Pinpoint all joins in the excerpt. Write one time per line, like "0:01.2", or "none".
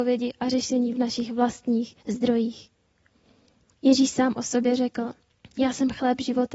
0:02.0
0:05.4